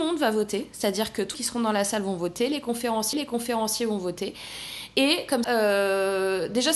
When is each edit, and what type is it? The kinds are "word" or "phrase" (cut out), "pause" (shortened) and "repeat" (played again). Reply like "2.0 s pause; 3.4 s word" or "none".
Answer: 1.3 s word; 3.1 s repeat; 5.4 s word